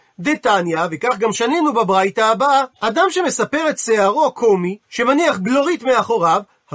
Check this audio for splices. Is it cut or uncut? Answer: cut